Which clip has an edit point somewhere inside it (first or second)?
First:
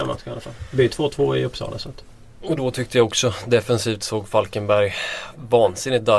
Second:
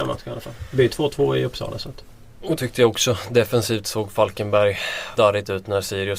second